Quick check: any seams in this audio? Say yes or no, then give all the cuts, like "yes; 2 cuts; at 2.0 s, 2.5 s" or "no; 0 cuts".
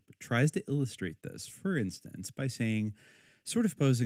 no; 0 cuts